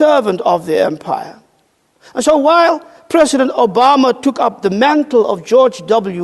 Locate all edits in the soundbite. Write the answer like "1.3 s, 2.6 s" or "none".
none